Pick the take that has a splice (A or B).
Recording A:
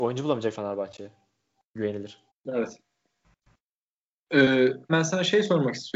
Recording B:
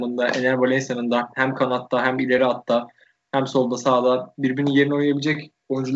A